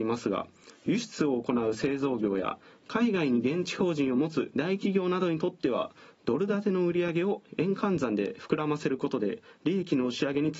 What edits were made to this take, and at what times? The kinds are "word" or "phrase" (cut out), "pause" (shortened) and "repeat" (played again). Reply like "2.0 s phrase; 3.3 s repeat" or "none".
none